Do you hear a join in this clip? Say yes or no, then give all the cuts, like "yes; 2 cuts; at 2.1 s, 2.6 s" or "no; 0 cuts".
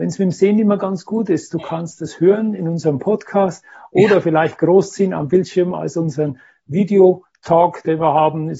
no; 0 cuts